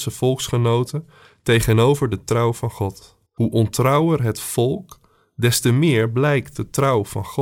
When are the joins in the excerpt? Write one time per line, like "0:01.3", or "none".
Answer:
0:03.3